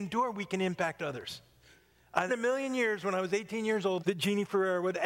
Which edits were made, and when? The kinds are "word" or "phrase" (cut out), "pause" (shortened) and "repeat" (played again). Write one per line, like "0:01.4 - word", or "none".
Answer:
0:02.3 - word
0:04.0 - word